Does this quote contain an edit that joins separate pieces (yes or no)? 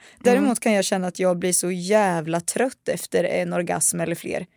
no